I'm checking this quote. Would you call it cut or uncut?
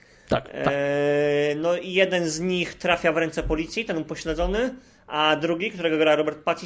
uncut